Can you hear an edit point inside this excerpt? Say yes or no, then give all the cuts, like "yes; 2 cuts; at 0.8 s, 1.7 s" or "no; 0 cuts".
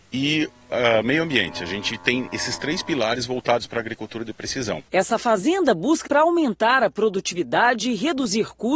yes; 2 cuts; at 4.9 s, 6.0 s